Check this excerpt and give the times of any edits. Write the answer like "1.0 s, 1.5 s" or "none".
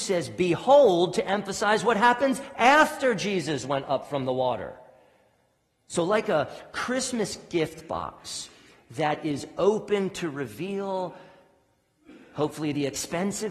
none